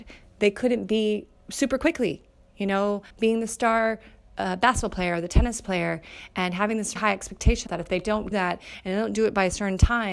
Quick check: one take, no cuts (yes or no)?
no